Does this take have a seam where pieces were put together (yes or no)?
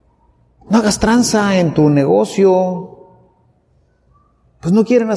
no